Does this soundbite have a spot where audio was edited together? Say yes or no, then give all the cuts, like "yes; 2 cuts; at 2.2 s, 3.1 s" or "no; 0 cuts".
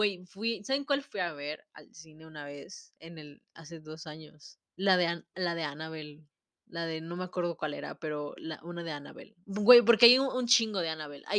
yes; 1 cut; at 4.7 s